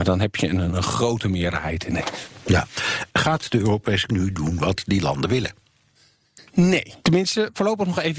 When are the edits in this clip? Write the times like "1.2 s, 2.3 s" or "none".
3.1 s, 4.1 s, 7.0 s